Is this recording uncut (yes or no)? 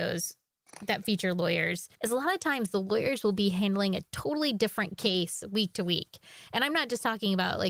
no